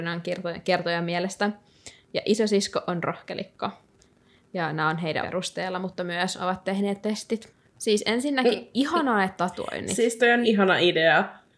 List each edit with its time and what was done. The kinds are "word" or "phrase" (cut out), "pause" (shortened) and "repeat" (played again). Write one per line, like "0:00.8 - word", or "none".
0:03.9 - pause
0:05.2 - phrase
0:07.0 - word
0:09.4 - phrase
0:10.4 - word